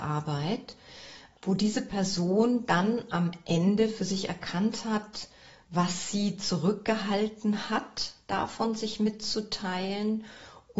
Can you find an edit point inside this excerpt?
no; 0 cuts

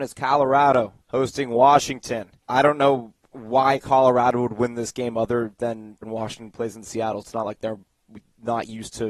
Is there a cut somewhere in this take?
yes; 5 cuts; at 1.0 s, 2.4 s, 3.2 s, 6.0 s, 7.2 s

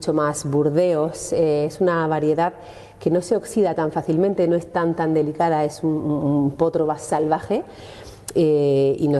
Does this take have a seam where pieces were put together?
no; 0 cuts

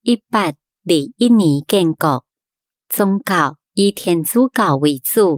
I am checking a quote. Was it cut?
yes; 1 cut; at 3.6 s

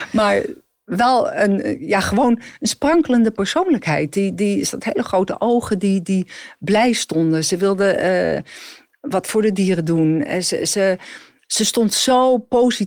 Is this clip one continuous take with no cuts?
yes; 0 cuts

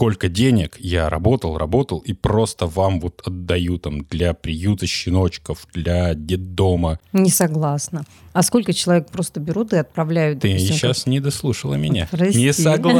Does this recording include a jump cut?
no; 0 cuts

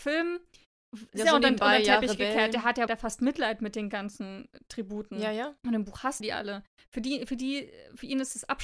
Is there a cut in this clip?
yes; 4 cuts; at 1.1 s, 2.9 s, 5.6 s, 6.2 s

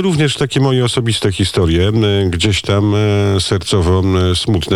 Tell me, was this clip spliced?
no; 0 cuts

